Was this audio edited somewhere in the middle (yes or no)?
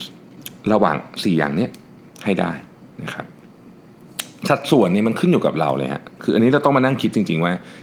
no